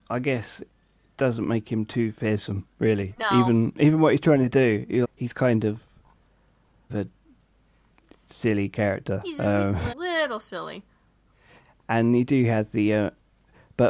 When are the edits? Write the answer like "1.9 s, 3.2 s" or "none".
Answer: 5.0 s, 6.9 s, 9.9 s